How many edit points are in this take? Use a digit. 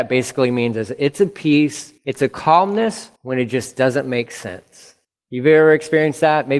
3